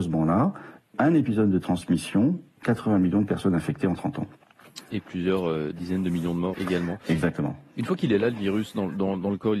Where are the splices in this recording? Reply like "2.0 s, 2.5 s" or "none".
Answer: 6.5 s